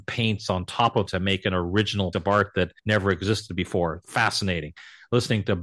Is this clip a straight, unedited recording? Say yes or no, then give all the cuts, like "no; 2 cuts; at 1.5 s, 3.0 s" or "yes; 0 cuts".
no; 3 cuts; at 1.1 s, 2.1 s, 2.8 s